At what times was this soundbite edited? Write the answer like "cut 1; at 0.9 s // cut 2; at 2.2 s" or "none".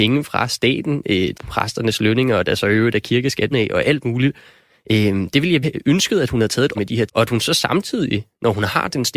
cut 1; at 1.3 s // cut 2; at 3.5 s // cut 3; at 5.6 s // cut 4; at 6.7 s // cut 5; at 7.1 s